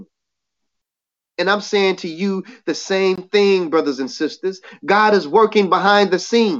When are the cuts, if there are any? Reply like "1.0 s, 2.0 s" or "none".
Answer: none